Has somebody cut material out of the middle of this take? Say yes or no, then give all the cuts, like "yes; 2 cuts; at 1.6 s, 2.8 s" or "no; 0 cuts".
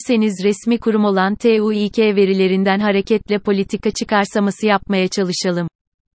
no; 0 cuts